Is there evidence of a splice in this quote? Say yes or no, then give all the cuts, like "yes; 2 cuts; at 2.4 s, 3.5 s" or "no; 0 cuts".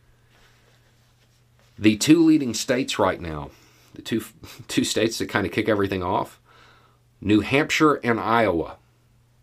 no; 0 cuts